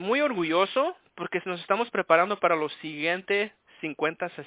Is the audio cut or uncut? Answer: uncut